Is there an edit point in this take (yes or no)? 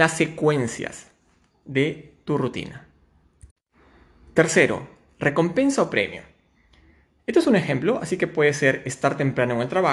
no